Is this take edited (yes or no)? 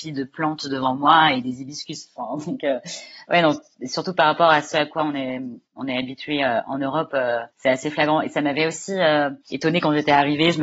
yes